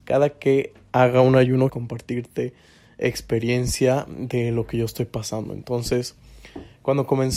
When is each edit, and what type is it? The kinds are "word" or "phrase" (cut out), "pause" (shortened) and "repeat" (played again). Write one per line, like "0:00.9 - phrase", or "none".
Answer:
0:01.7 - phrase